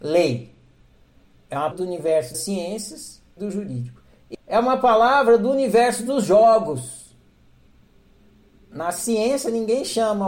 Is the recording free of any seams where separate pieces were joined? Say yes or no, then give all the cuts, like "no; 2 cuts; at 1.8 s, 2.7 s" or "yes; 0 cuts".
no; 4 cuts; at 1.7 s, 2.3 s, 3.4 s, 4.3 s